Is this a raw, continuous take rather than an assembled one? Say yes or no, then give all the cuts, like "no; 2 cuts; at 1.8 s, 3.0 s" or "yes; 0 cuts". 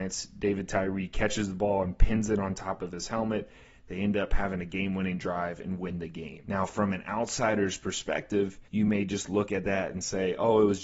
no; 1 cut; at 8.7 s